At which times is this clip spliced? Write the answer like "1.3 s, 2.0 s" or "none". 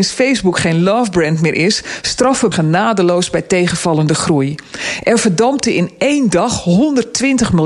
2.5 s